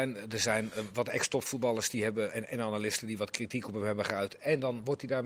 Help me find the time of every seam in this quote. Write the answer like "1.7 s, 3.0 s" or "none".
2.3 s

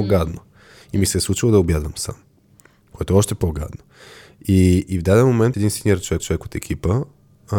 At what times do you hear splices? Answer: 5.5 s, 6.2 s

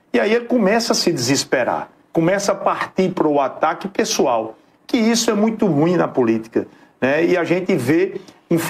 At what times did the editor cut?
none

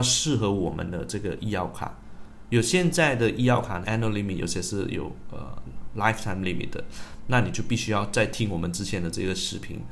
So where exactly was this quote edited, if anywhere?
3.8 s

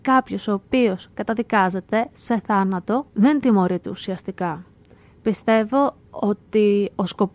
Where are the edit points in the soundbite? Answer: 3.1 s, 6.1 s

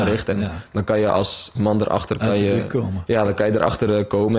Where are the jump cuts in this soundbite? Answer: 1.6 s

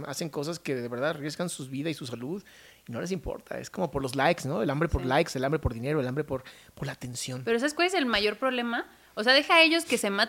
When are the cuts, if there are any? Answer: none

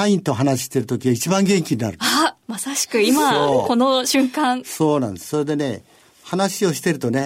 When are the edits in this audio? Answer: 2.4 s

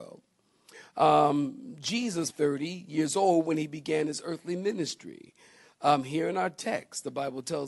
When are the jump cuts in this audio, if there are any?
2.3 s

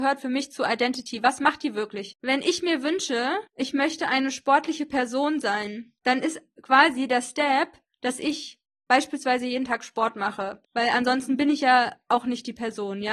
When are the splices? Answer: 2.2 s, 3.5 s, 6.0 s, 10.6 s

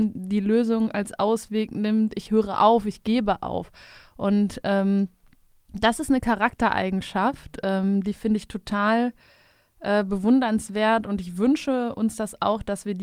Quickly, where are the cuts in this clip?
none

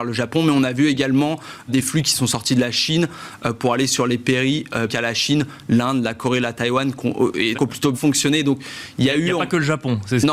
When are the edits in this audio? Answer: 1.7 s, 4.9 s, 7.5 s, 7.9 s

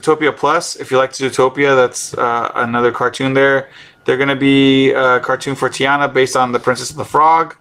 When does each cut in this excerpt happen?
none

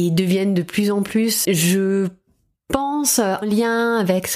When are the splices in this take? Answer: 1.4 s, 3.4 s

